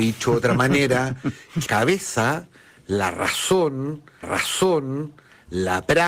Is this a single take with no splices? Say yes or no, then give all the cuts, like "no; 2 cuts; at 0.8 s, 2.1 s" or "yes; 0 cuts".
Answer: no; 2 cuts; at 1.7 s, 4.2 s